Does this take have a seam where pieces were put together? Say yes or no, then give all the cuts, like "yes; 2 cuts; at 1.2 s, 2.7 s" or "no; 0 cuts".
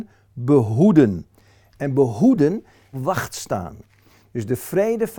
yes; 1 cut; at 2.9 s